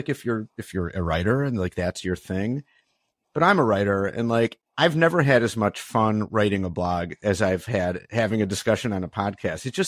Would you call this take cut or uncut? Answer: uncut